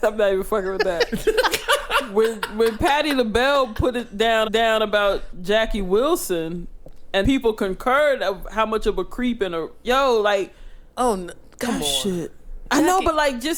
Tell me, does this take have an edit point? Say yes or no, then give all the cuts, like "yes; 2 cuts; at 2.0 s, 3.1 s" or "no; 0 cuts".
yes; 3 cuts; at 4.4 s, 7.2 s, 10.9 s